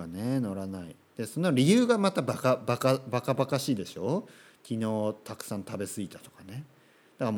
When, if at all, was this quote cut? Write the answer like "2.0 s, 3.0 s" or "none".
none